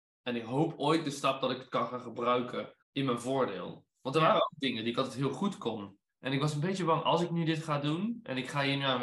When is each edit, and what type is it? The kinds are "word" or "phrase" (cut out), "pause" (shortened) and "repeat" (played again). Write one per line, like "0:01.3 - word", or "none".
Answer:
0:02.8 - pause
0:06.1 - pause